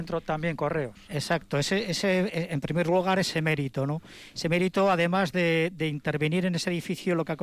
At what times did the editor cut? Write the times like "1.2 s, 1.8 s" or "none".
none